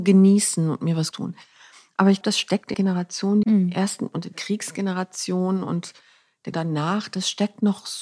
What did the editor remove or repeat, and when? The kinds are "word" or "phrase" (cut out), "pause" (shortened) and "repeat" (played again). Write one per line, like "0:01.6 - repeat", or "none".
0:01.1 - word
0:02.2 - word
0:02.7 - word
0:03.4 - word
0:04.3 - word
0:06.5 - word